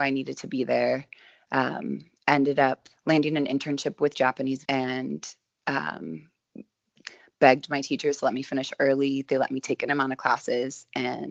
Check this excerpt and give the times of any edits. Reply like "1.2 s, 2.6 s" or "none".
2.2 s, 3.0 s, 4.6 s, 9.9 s